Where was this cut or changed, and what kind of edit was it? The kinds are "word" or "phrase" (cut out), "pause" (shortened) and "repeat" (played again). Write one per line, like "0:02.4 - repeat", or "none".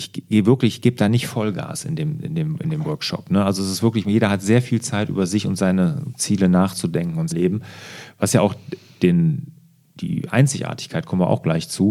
0:07.3 - word